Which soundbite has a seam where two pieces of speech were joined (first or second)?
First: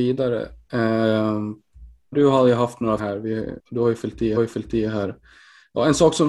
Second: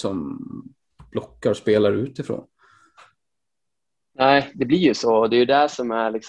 first